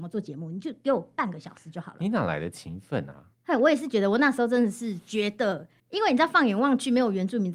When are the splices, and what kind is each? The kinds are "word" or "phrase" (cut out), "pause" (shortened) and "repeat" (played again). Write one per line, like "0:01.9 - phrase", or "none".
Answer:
0:03.3 - pause
0:05.8 - pause